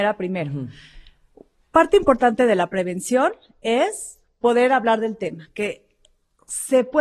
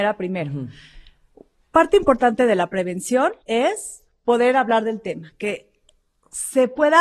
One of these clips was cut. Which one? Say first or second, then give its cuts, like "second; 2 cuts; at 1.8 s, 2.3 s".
second; 1 cut; at 3.4 s